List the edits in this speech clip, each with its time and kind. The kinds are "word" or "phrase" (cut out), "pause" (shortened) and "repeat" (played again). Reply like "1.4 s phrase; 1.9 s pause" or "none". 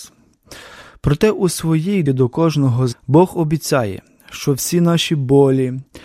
2.1 s word; 2.9 s word